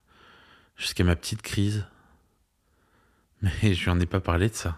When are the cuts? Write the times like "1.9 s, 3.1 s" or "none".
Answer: none